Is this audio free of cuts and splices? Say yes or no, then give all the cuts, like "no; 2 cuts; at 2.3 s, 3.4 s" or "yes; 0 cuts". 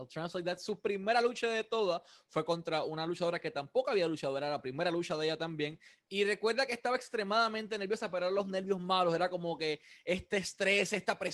yes; 0 cuts